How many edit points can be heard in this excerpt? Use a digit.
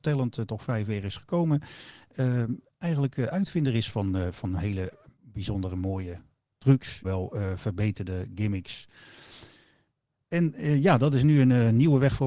1